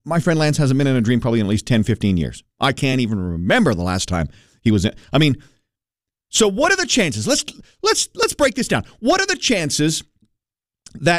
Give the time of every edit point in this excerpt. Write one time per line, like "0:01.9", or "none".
none